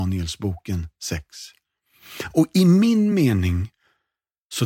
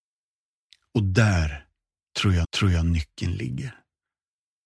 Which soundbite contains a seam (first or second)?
second